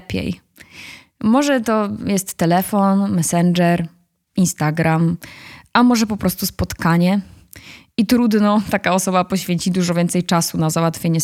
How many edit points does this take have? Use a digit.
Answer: 0